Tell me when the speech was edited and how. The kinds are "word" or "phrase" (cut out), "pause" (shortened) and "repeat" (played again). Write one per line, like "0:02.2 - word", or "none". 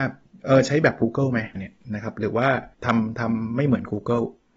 0:01.6 - word
0:02.7 - pause

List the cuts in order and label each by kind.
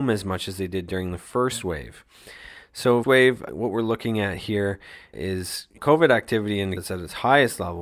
0:03.0 - word
0:03.5 - word
0:05.1 - word
0:05.8 - word
0:06.8 - word

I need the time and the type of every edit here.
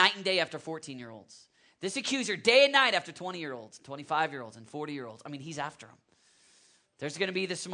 none

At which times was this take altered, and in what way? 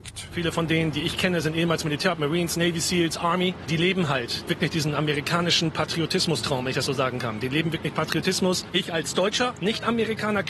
none

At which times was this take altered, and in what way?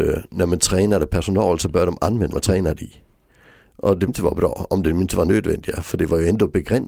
0:02.3 - word
0:04.1 - word

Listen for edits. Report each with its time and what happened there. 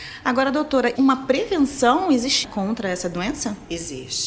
0:01.0 - word
0:02.4 - word

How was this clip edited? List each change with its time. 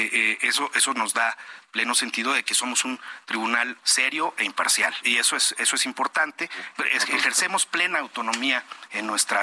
0:03.8 - word
0:05.0 - word

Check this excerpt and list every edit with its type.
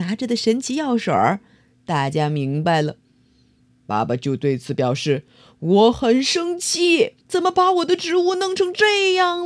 0:07.2 - pause

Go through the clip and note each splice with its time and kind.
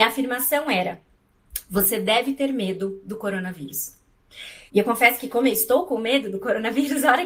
0:04.7 - pause

